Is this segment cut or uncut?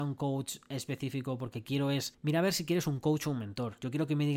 cut